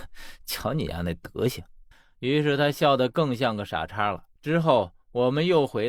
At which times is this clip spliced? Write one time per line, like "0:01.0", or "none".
0:01.9
0:04.3